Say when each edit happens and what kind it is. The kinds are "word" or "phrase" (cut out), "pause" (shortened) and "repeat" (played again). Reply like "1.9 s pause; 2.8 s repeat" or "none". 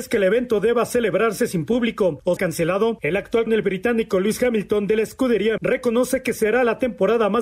2.4 s word; 3.5 s word; 5.6 s word